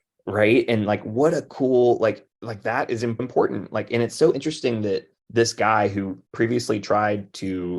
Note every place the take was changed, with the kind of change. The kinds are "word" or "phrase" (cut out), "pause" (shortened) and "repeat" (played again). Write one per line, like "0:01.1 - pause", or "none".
0:02.3 - pause
0:03.2 - word
0:05.2 - pause
0:06.3 - pause